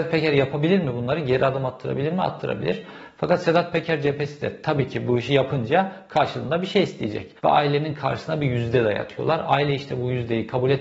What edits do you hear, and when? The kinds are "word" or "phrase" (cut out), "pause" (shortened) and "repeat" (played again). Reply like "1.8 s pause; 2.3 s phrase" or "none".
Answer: 7.4 s pause

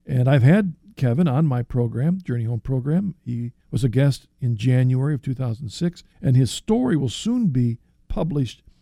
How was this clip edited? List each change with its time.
3.6 s pause; 6.1 s pause

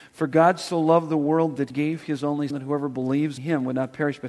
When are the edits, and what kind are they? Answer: 1.7 s word; 2.5 s word; 3.4 s word

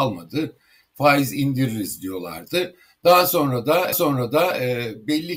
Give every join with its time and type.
3.9 s repeat

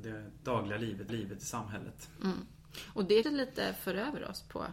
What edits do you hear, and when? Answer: 1.1 s repeat; 3.2 s word

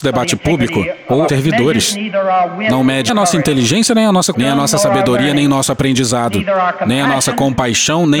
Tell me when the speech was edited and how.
1.3 s phrase; 3.1 s word; 4.3 s word

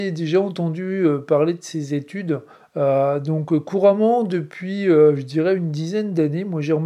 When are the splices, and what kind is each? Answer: 2.5 s pause

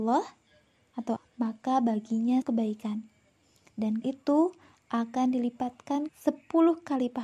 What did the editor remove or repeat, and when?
1.2 s word; 2.4 s word; 4.0 s word; 6.1 s word

